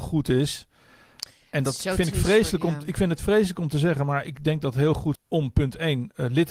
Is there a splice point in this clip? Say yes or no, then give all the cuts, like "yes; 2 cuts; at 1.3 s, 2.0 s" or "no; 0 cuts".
yes; 1 cut; at 5.1 s